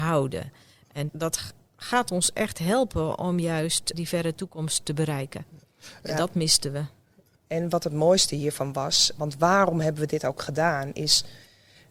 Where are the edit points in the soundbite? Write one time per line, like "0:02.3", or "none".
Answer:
0:01.1
0:03.9
0:09.2